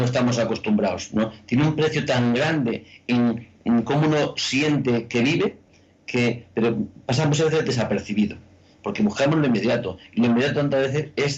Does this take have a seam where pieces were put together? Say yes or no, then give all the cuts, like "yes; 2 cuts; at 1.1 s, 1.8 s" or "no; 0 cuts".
no; 0 cuts